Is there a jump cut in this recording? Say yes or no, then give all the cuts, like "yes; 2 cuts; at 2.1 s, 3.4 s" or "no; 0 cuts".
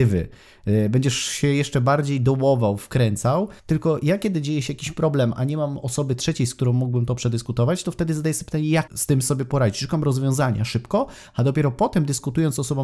yes; 2 cuts; at 3.6 s, 8.9 s